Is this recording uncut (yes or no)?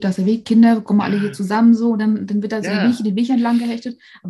yes